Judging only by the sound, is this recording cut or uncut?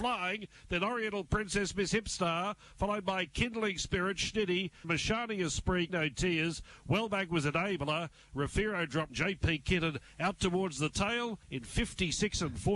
cut